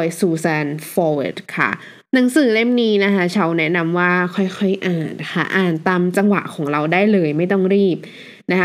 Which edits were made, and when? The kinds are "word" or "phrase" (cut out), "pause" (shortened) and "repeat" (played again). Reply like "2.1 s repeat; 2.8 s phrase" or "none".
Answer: 2.1 s pause

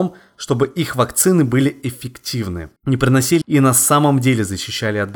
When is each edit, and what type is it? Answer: 2.8 s pause; 3.4 s word

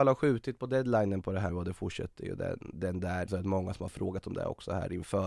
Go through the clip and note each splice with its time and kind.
1.5 s word; 3.3 s word

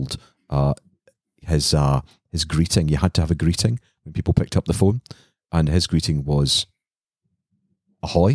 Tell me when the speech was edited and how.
none

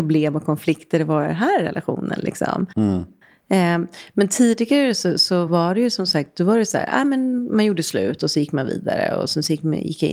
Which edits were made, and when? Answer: none

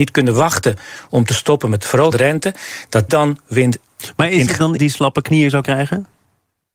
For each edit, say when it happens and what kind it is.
2.1 s word; 3.1 s word; 4.5 s word; 4.8 s word; 5.6 s word

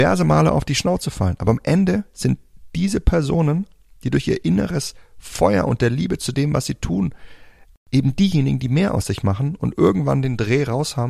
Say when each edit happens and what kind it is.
none

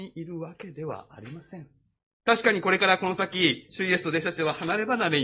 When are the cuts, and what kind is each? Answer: 2.1 s pause

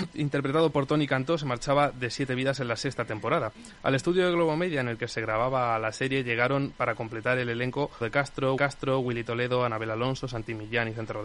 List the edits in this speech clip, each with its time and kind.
8.0 s word; 8.6 s repeat

